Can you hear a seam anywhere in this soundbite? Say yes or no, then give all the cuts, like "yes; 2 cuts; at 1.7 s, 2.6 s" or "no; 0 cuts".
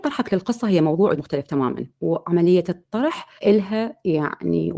yes; 3 cuts; at 1.2 s, 1.9 s, 3.4 s